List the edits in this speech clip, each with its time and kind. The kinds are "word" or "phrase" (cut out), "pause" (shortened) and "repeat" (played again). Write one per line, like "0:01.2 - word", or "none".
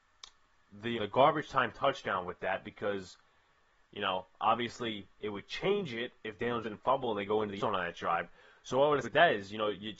0:01.0 - word
0:06.6 - word
0:07.6 - word
0:09.0 - word